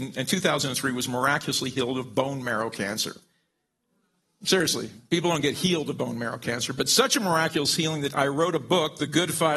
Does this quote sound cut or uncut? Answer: uncut